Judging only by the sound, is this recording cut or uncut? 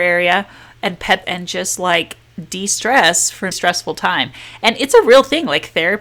cut